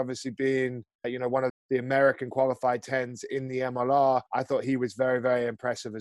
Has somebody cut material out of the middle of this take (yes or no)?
yes